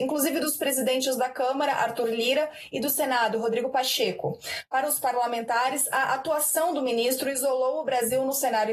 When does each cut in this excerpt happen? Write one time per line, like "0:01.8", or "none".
none